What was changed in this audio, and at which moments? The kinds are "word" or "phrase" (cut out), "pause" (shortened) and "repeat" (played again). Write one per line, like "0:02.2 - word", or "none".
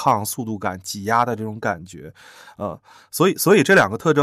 none

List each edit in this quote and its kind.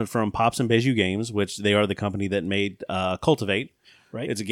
none

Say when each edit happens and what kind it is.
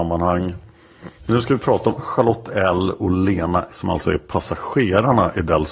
0:01.2 - pause
0:02.0 - phrase
0:03.7 - word

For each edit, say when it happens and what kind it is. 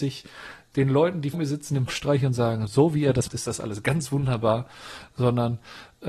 0:01.3 - word
0:01.9 - word
0:02.7 - word
0:03.3 - word

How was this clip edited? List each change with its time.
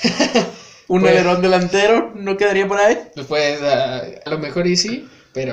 0:04.3 - word

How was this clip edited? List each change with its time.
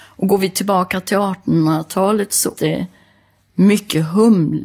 0:02.5 - word

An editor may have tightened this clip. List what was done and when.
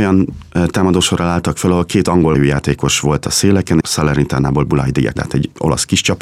0:02.3 - word
0:03.8 - word
0:05.2 - word

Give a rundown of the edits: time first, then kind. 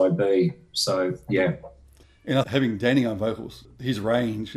0:02.4 - word

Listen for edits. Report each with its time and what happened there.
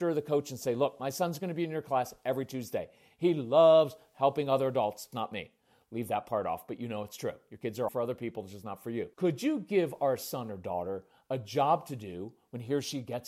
0:05.1 - word
0:07.9 - word
0:09.1 - pause

